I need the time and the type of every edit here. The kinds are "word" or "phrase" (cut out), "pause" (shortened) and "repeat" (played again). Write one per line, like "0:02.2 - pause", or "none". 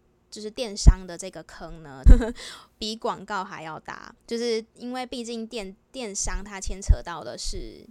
0:02.1 - phrase
0:04.2 - pause